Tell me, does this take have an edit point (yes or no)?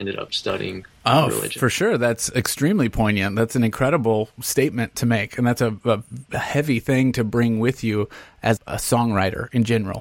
yes